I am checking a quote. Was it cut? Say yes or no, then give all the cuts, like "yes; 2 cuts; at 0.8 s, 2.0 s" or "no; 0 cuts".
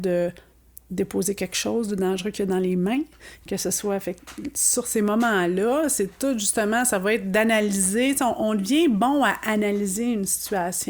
no; 0 cuts